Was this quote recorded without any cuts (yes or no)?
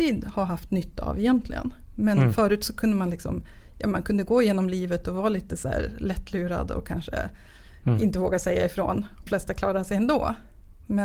no